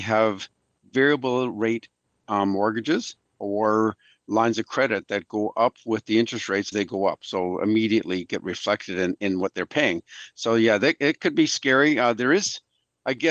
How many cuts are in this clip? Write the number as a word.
one